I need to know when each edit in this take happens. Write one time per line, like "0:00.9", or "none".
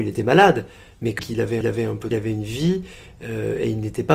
0:01.2
0:01.6
0:02.1